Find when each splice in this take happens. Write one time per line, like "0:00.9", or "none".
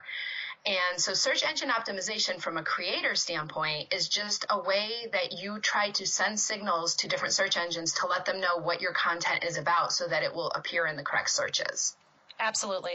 none